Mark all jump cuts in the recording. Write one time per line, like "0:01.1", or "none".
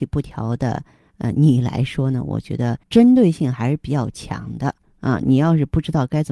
0:02.8